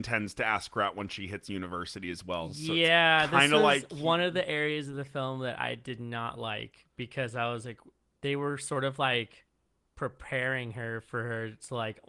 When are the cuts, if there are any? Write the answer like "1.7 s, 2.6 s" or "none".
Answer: none